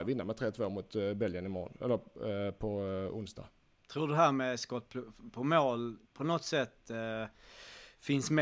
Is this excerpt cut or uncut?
cut